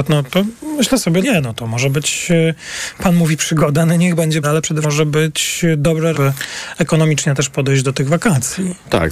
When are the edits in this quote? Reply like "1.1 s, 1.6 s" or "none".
1.2 s, 4.4 s, 4.8 s, 6.1 s